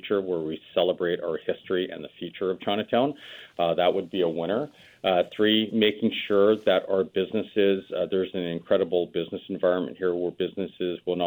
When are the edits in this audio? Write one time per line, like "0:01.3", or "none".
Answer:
none